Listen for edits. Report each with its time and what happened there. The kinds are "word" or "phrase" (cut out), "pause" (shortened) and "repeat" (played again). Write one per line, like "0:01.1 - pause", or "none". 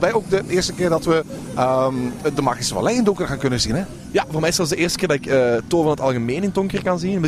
none